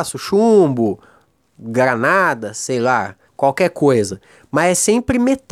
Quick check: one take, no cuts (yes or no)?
no